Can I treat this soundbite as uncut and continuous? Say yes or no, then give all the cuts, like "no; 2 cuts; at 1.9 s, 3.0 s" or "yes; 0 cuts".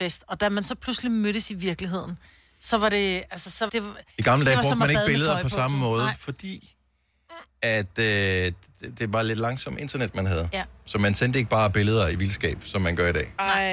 no; 3 cuts; at 3.7 s, 4.1 s, 7.5 s